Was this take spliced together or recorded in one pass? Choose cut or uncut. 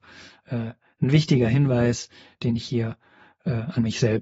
uncut